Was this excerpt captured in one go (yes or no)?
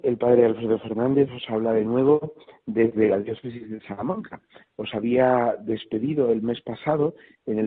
yes